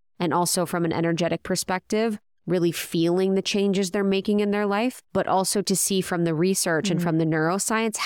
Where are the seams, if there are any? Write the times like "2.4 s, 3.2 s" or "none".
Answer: 5.1 s